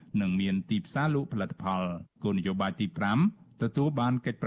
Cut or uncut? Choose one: cut